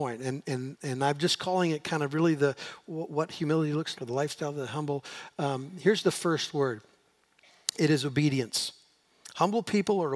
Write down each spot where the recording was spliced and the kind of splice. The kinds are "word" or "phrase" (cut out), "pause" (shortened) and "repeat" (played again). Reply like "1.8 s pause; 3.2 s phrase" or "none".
3.9 s word